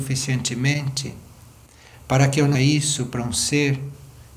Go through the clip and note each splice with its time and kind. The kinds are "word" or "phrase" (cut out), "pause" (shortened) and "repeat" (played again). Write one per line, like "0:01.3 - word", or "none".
0:02.5 - word